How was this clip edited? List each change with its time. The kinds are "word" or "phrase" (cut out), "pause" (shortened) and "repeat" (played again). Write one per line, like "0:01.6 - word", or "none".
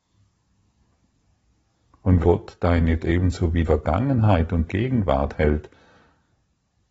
0:02.2 - word
0:03.0 - word
0:03.7 - word
0:04.7 - word